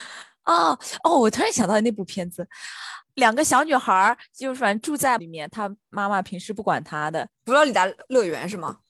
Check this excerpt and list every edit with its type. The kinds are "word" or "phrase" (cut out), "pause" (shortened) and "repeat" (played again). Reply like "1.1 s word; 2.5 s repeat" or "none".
5.2 s word; 7.3 s pause